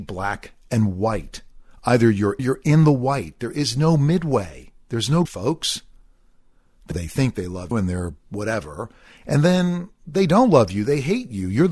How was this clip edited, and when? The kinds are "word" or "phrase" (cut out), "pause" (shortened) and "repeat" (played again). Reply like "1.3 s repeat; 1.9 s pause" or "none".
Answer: 2.4 s phrase; 5.3 s phrase; 6.9 s phrase; 7.7 s word